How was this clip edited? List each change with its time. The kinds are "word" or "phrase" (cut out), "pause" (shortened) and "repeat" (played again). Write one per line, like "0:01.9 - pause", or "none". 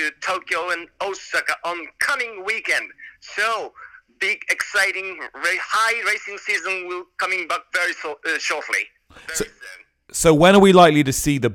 none